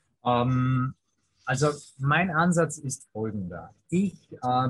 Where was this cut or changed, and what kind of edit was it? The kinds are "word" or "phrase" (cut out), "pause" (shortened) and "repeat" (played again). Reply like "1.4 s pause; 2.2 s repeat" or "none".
none